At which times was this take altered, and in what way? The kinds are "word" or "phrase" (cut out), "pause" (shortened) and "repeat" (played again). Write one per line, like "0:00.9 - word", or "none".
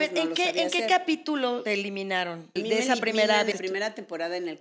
0:01.7 - word
0:02.6 - word
0:03.5 - word